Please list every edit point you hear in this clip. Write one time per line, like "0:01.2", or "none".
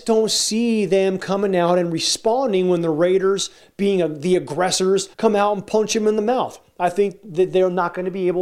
0:05.1